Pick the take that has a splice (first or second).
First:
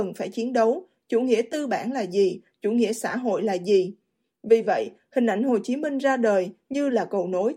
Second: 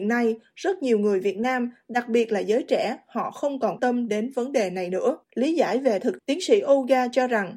second